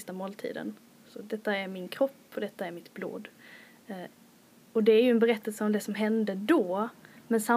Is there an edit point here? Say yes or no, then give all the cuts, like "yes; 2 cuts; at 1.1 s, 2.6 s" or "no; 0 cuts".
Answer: no; 0 cuts